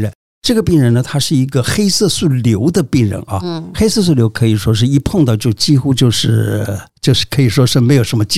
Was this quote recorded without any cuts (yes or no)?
no